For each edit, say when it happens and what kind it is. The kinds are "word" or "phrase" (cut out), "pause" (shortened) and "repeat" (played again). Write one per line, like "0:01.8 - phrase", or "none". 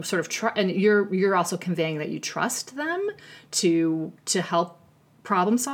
0:04.2 - pause